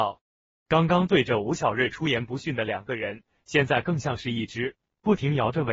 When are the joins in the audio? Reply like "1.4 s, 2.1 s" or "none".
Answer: none